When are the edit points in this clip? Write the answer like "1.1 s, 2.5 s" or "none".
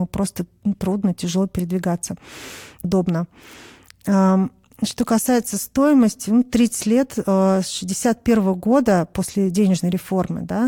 2.8 s